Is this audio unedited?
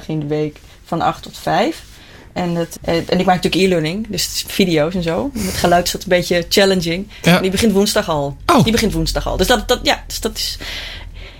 no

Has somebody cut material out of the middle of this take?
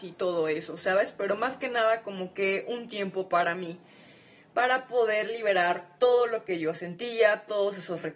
no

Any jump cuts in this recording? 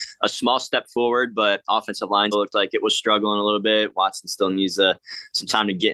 yes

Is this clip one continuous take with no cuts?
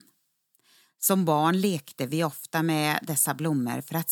yes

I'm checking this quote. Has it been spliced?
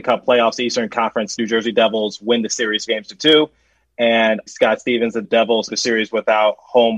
yes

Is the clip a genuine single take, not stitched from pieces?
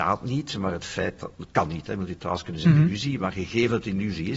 yes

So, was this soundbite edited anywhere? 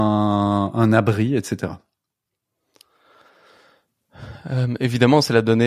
no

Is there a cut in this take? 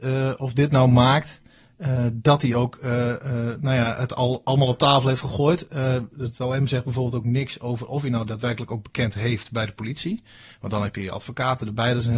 no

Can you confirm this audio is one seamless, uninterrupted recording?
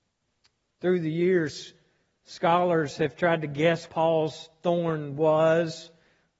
no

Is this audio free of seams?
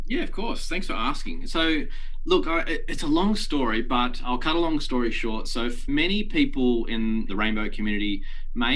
no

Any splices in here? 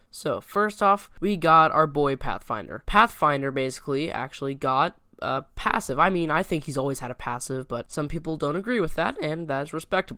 no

